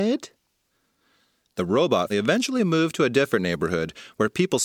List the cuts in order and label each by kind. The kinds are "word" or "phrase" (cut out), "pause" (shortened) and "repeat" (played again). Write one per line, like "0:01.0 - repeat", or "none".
0:02.1 - word